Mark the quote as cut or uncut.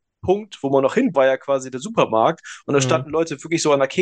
cut